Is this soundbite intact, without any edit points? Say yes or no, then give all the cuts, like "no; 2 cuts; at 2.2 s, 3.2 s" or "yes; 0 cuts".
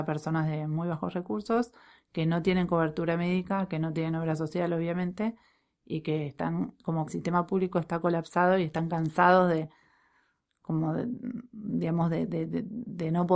no; 1 cut; at 7.1 s